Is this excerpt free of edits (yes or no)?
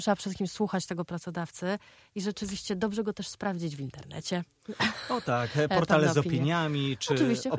yes